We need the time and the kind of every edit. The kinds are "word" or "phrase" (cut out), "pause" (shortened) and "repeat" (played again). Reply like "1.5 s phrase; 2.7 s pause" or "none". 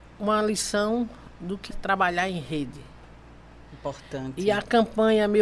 1.7 s word